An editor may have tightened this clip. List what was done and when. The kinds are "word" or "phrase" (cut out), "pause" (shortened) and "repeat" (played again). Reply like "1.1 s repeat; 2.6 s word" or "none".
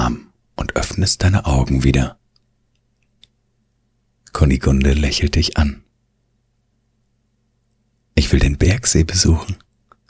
none